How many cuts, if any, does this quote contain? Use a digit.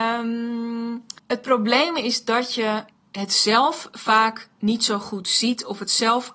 2